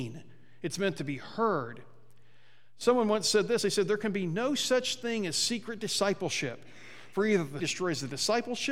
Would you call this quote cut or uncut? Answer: cut